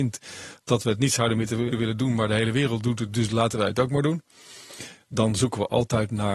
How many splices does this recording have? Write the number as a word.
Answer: one